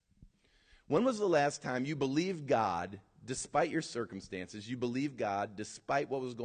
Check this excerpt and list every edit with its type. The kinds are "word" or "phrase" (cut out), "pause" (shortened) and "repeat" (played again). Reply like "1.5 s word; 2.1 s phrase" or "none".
none